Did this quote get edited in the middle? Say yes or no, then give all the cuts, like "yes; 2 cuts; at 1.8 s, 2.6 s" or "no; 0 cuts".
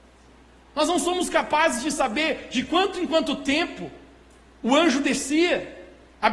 no; 0 cuts